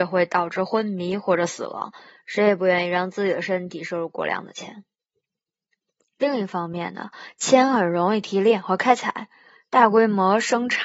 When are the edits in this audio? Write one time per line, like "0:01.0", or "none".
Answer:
none